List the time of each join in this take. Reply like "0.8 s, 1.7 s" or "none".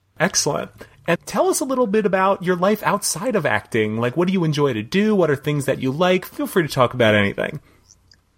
1.1 s